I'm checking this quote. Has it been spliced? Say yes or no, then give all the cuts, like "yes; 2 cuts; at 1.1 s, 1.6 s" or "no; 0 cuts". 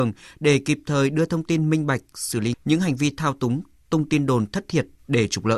yes; 1 cut; at 2.5 s